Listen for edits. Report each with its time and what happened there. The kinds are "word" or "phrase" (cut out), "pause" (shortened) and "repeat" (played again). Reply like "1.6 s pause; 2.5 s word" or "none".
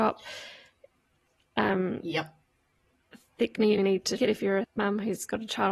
3.8 s word; 4.2 s word; 4.6 s word